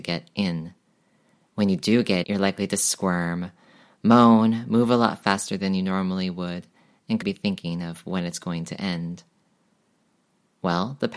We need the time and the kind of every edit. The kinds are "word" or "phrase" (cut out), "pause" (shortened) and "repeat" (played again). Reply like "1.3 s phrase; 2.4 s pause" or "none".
2.2 s word; 7.2 s word